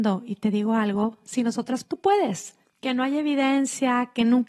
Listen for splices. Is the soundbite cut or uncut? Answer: cut